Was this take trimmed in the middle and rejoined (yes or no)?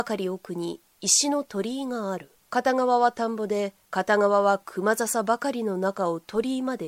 yes